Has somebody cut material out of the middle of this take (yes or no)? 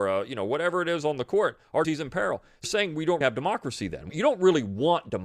yes